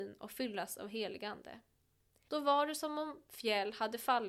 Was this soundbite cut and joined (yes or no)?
no